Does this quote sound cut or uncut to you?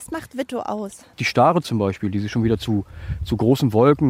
uncut